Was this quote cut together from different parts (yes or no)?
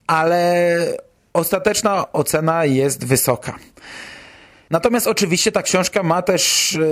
no